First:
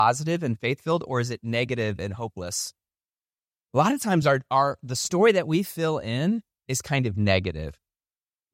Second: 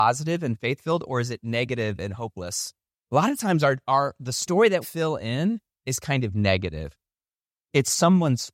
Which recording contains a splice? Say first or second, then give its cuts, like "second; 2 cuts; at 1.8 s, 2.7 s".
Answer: second; 2 cuts; at 2.9 s, 4.8 s